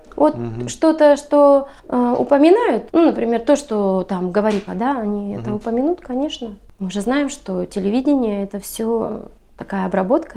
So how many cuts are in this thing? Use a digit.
3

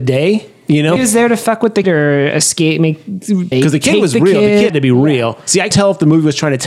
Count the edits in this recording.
5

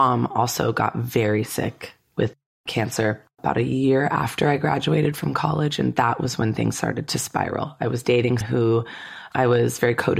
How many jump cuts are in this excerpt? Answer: 1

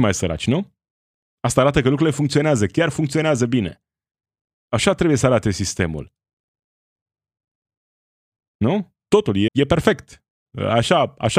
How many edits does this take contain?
2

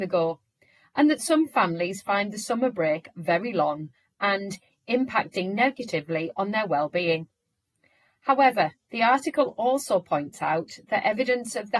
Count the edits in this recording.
0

